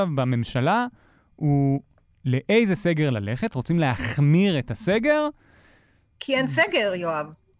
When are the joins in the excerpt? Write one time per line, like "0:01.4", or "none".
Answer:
none